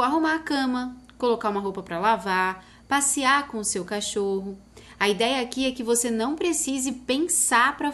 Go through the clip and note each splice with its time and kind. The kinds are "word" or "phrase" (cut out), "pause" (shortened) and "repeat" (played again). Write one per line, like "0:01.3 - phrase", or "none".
none